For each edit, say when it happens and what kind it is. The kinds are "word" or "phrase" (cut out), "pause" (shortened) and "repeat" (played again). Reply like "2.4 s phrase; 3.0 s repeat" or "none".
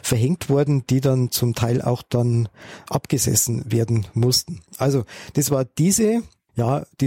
4.7 s pause